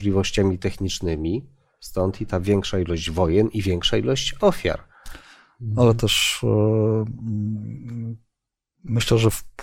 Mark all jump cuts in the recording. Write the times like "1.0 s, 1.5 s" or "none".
none